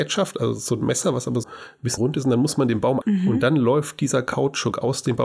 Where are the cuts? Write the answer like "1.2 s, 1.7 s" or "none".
1.4 s, 2.0 s, 3.0 s